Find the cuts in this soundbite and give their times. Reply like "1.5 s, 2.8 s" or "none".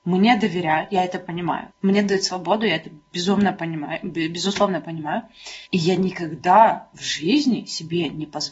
1.7 s, 5.7 s